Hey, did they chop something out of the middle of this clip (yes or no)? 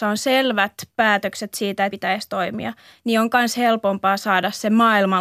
yes